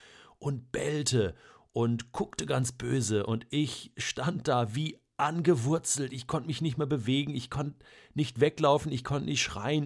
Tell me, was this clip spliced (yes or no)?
no